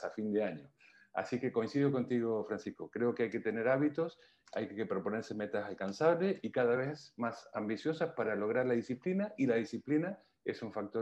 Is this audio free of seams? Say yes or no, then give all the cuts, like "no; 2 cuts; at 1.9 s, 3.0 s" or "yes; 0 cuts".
yes; 0 cuts